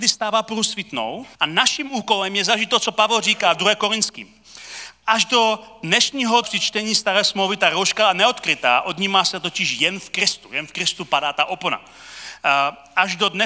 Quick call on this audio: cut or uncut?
cut